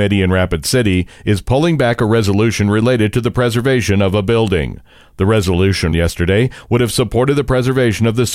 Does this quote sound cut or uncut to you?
cut